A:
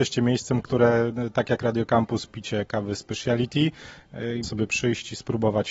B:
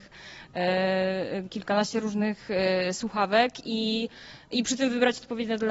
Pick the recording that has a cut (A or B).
A